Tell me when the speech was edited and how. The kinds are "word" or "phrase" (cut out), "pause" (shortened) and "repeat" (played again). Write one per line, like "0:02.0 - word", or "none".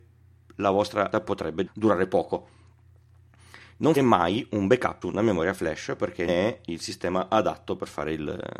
0:01.1 - word
0:01.7 - word
0:04.0 - word
0:05.0 - word
0:06.3 - word